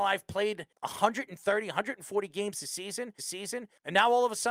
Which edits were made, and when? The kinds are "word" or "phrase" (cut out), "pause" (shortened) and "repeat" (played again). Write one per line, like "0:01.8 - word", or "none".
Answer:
0:03.2 - repeat